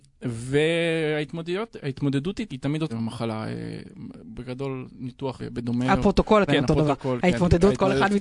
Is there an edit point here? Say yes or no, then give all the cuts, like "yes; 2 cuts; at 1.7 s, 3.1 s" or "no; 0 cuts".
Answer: yes; 4 cuts; at 2.5 s, 2.9 s, 5.4 s, 6.5 s